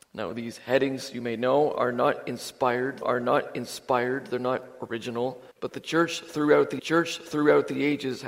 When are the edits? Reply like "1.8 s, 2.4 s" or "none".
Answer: 3.0 s, 5.5 s, 6.8 s